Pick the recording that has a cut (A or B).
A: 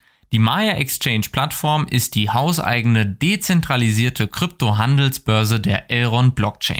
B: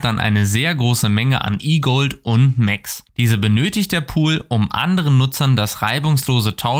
B